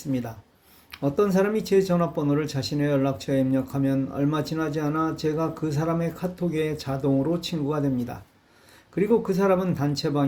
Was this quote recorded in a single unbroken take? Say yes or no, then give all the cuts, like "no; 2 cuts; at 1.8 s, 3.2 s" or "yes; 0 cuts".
yes; 0 cuts